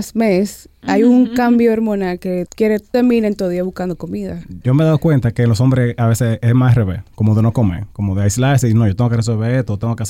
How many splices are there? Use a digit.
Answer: 2